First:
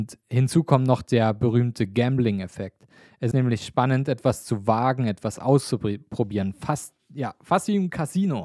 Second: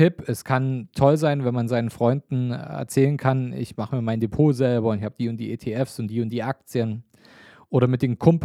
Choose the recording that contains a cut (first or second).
first